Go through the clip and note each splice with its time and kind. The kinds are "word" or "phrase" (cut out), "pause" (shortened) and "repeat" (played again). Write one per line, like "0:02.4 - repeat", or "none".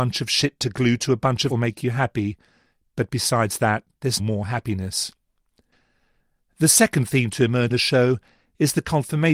0:01.5 - phrase
0:04.2 - word
0:07.7 - word